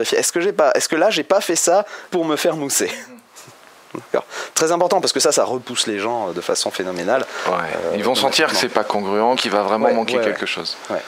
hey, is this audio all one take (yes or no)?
no